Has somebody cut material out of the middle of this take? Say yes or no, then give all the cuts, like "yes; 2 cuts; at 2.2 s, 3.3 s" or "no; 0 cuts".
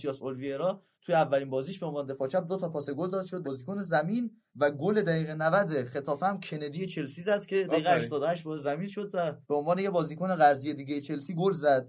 yes; 4 cuts; at 0.9 s, 3.4 s, 4.5 s, 9.4 s